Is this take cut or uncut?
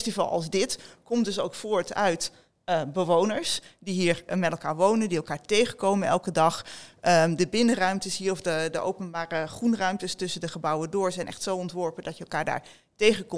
uncut